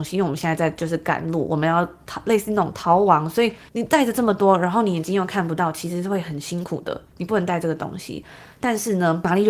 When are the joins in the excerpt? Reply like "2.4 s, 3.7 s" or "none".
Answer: 3.7 s